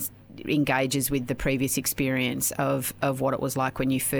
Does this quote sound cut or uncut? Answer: uncut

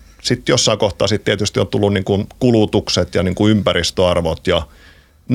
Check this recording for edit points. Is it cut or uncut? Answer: uncut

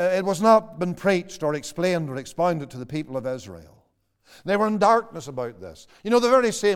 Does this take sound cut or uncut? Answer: uncut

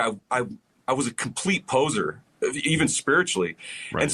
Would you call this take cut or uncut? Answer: uncut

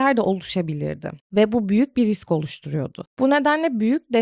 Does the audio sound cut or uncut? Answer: uncut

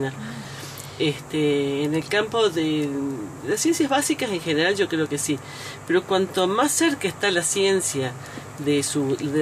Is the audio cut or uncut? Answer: uncut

